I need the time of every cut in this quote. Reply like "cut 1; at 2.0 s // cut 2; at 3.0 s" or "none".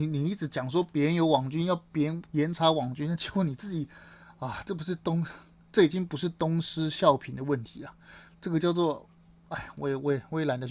cut 1; at 2.3 s